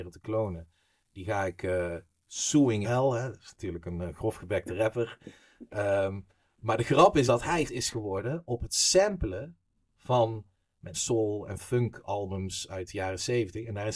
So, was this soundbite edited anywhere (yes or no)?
yes